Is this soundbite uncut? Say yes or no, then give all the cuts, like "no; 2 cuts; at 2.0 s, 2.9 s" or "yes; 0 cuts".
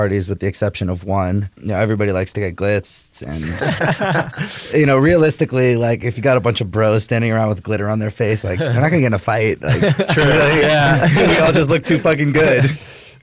no; 1 cut; at 1.5 s